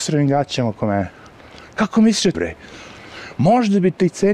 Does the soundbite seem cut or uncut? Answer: cut